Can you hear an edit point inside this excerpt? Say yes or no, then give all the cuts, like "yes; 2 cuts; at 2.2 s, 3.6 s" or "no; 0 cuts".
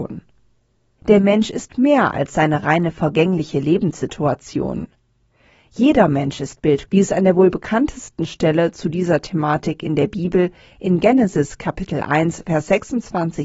yes; 1 cut; at 6.9 s